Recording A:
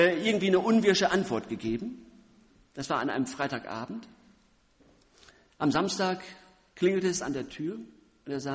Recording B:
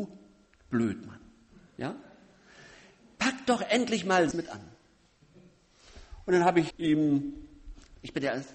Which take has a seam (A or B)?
B